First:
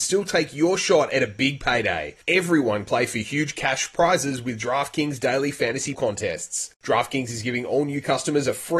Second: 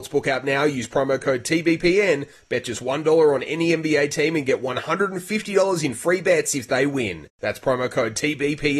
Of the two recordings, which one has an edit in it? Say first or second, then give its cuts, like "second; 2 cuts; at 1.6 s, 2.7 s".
first; 2 cuts; at 2.9 s, 5.9 s